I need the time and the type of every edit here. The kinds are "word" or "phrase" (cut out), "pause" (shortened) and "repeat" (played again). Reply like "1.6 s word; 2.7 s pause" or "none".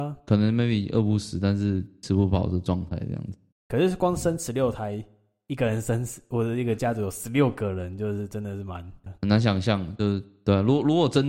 3.5 s pause

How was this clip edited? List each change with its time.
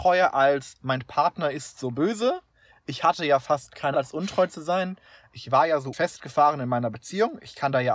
3.9 s phrase; 5.9 s phrase

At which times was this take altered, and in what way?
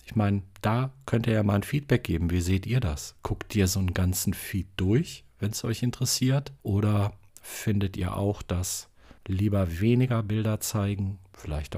6.6 s pause; 9.2 s pause

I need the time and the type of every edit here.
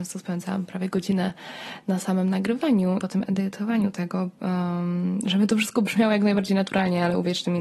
3.0 s word

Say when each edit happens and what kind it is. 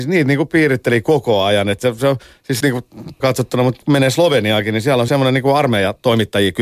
2.6 s word; 3.2 s word; 3.8 s word; 5.1 s word

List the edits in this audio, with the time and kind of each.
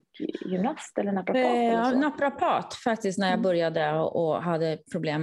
none

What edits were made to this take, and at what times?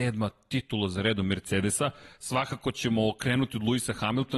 none

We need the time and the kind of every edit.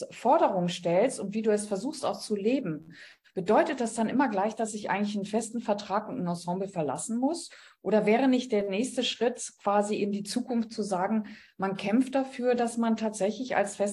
none

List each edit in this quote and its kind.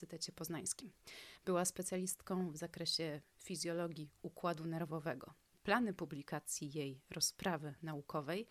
none

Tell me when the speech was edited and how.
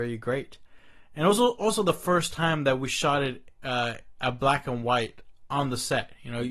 none

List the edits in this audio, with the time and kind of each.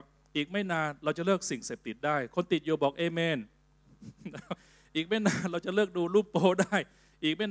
none

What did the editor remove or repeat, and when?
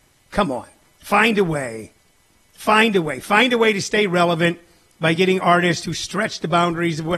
none

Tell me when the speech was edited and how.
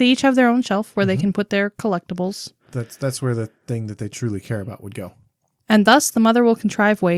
none

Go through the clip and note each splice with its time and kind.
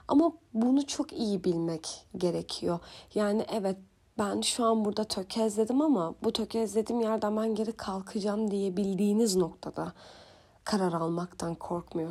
none

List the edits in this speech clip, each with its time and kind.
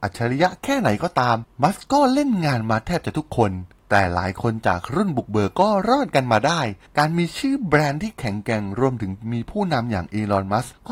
1.5 s pause

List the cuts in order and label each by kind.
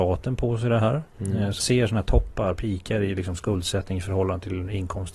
1.6 s word

